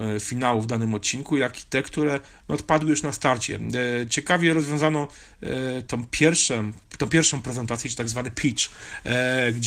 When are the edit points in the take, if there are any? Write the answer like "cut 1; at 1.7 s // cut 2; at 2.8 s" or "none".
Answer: none

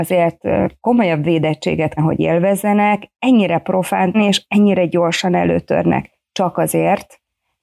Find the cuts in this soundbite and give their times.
cut 1; at 2.0 s // cut 2; at 4.1 s

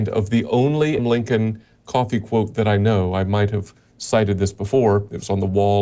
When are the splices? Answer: cut 1; at 1.0 s

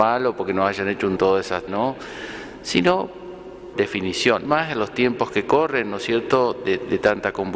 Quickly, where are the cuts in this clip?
cut 1; at 1.2 s // cut 2; at 1.7 s // cut 3; at 3.7 s // cut 4; at 4.5 s

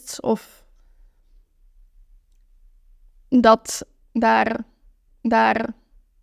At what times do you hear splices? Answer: cut 1; at 5.1 s

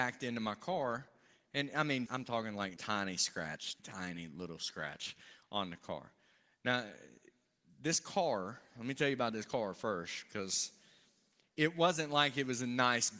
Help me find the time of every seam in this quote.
cut 1; at 2.1 s // cut 2; at 2.8 s // cut 3; at 3.8 s

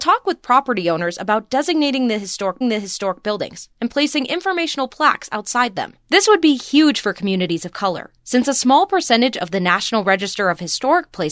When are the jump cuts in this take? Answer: cut 1; at 2.6 s // cut 2; at 6.0 s // cut 3; at 8.2 s

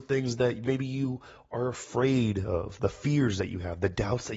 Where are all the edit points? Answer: none

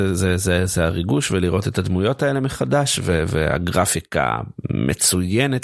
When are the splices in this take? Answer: none

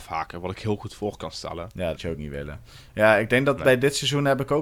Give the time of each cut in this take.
cut 1; at 2.0 s

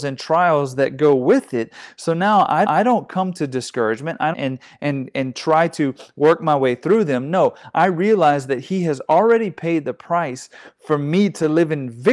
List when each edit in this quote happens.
cut 1; at 2.7 s // cut 2; at 4.3 s

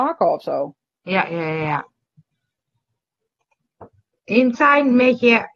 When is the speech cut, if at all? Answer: cut 1; at 4.5 s

